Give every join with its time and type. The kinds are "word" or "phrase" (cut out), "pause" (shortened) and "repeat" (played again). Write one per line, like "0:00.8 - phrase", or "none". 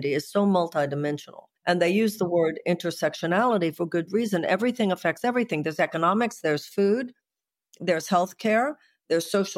0:01.6 - pause